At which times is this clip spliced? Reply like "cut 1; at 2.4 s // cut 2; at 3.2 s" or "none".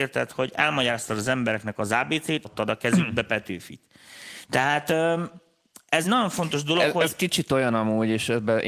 cut 1; at 2.4 s // cut 2; at 6.0 s